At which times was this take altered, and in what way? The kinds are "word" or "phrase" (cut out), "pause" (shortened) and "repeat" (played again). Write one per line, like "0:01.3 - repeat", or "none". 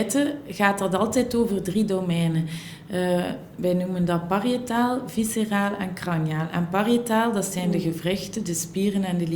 none